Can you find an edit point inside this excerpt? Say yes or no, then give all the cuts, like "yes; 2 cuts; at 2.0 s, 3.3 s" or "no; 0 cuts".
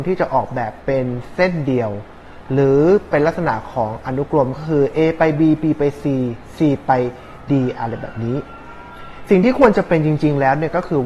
no; 0 cuts